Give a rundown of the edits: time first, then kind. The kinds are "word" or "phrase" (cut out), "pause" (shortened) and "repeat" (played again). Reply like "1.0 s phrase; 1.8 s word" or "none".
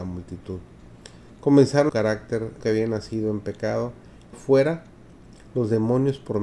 1.9 s phrase; 2.6 s word; 4.3 s phrase